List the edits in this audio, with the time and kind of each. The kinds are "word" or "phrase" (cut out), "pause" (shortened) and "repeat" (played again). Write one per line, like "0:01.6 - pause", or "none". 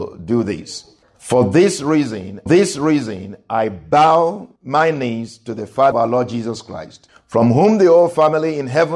0:02.5 - repeat
0:04.6 - pause
0:05.9 - word